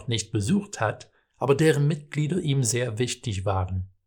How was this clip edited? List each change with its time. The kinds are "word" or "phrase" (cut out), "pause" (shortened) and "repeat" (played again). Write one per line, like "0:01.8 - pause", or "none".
none